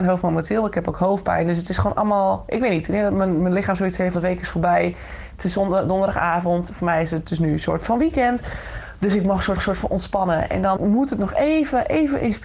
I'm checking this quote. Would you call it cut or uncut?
cut